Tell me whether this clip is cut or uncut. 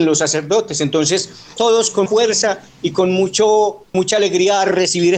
cut